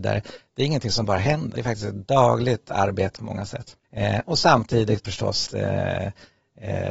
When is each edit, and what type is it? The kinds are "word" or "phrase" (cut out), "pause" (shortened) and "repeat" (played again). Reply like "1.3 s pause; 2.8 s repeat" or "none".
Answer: 1.6 s word; 3.2 s phrase; 3.8 s pause; 5.0 s word; 5.5 s word